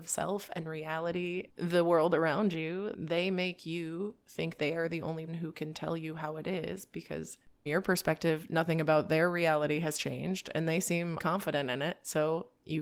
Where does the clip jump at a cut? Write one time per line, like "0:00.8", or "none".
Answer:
0:01.5
0:02.9
0:04.6
0:05.3
0:07.7
0:11.2